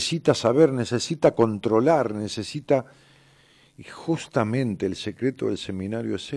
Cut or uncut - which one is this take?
uncut